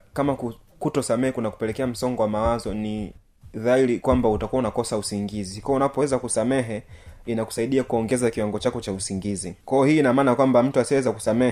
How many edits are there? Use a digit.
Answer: 1